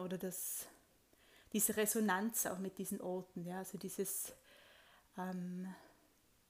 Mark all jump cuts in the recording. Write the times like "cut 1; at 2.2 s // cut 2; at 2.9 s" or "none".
none